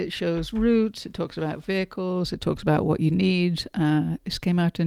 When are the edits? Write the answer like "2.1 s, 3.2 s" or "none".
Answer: none